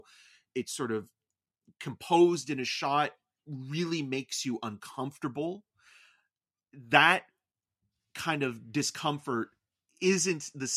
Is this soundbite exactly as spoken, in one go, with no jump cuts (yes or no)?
yes